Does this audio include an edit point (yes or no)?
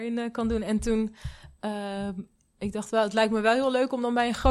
no